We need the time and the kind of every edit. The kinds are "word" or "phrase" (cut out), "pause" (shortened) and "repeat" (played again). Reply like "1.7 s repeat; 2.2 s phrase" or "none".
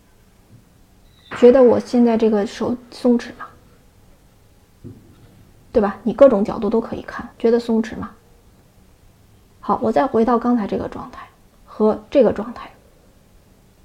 7.3 s pause